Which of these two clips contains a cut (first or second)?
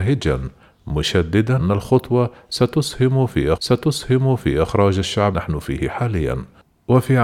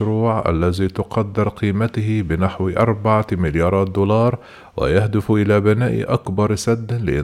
first